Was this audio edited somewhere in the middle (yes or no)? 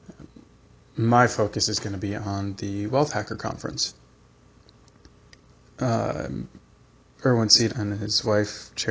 yes